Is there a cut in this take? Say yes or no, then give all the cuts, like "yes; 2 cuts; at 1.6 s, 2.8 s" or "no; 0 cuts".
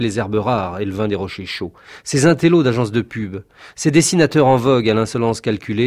no; 0 cuts